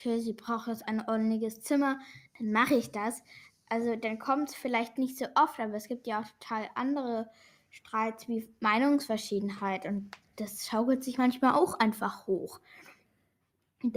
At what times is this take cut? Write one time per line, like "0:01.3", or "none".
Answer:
none